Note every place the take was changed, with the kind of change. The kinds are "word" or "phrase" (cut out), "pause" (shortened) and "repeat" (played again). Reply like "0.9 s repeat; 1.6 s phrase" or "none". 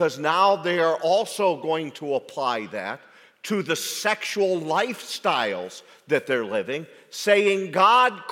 none